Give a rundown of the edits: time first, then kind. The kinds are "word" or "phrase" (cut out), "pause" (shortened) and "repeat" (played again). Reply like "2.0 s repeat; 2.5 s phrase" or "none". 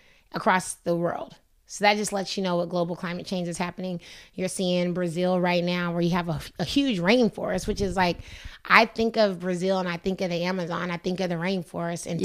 1.5 s pause